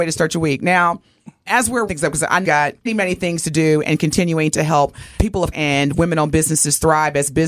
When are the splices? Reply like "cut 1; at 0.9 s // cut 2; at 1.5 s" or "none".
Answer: cut 1; at 1.5 s // cut 2; at 1.9 s // cut 3; at 2.4 s // cut 4; at 2.9 s // cut 5; at 5.2 s // cut 6; at 5.5 s

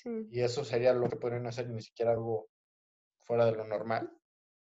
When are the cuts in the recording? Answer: cut 1; at 1.1 s // cut 2; at 2.2 s

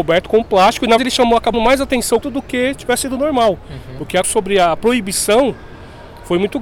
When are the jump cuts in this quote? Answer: cut 1; at 1.0 s // cut 2; at 1.5 s // cut 3; at 2.2 s // cut 4; at 4.2 s

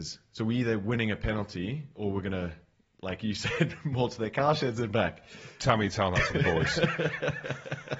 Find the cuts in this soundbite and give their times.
none

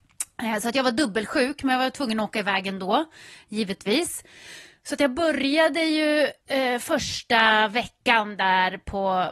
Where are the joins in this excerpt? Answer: cut 1; at 6.4 s // cut 2; at 8.0 s

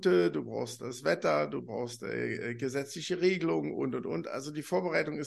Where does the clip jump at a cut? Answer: none

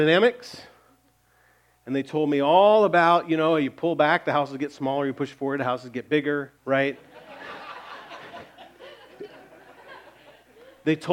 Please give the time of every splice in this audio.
cut 1; at 6.6 s

